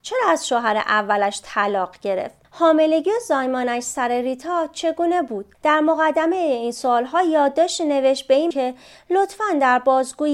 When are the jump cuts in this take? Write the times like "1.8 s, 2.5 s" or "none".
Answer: 2.4 s, 5.5 s, 8.5 s